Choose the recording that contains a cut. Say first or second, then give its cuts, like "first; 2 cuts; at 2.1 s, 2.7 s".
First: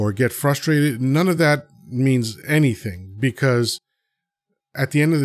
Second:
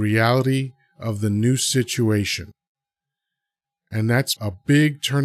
second; 1 cut; at 4.4 s